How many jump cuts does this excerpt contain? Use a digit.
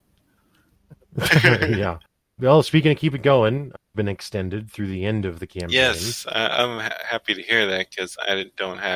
1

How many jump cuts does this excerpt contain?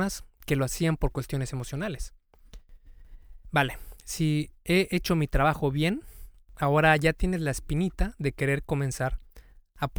0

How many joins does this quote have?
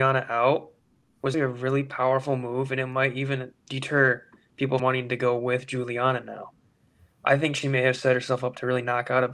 3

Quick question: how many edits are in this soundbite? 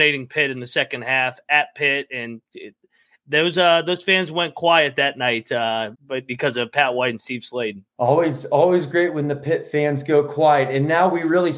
2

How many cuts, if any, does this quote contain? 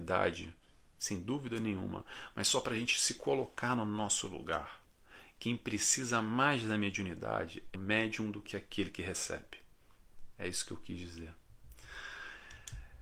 1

